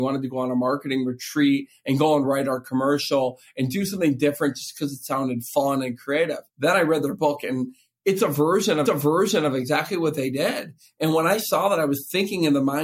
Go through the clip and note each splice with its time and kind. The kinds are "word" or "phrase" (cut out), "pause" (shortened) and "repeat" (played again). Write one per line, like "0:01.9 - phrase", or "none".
0:06.5 - pause
0:08.9 - repeat